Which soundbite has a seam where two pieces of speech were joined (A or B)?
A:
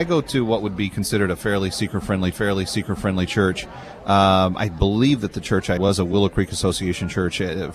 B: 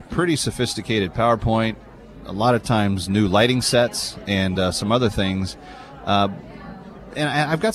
A